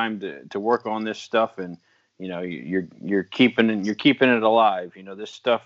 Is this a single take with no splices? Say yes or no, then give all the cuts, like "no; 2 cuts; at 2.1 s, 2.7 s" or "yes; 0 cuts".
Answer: yes; 0 cuts